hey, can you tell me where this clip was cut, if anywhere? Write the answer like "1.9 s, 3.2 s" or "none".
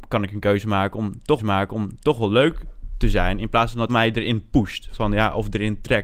1.4 s, 3.9 s